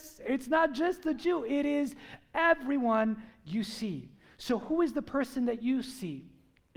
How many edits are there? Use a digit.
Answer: 0